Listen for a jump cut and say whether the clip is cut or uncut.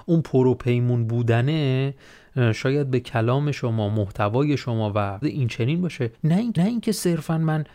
cut